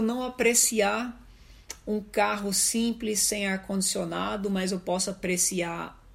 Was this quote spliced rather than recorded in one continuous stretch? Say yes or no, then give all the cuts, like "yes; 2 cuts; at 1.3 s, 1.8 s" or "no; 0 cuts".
no; 0 cuts